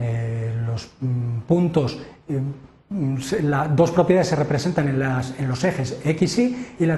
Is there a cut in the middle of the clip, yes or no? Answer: no